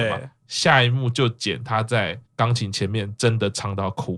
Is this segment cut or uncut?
cut